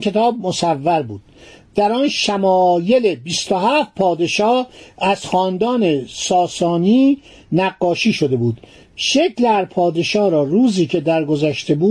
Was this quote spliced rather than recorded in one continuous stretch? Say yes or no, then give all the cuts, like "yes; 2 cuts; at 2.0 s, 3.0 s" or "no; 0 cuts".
no; 0 cuts